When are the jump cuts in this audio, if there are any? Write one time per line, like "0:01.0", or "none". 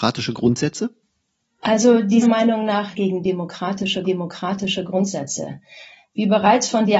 0:02.2
0:02.9
0:04.0